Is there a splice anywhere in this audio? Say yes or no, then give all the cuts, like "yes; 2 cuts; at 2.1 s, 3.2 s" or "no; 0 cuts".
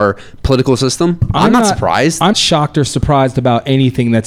yes; 1 cut; at 2.3 s